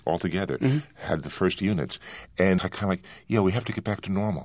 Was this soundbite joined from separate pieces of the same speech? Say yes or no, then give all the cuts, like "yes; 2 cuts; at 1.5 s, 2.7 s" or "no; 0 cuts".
yes; 1 cut; at 2.6 s